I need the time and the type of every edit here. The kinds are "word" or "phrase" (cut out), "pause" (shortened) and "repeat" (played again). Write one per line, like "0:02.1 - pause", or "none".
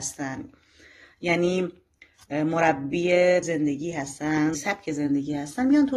0:03.4 - word
0:04.5 - word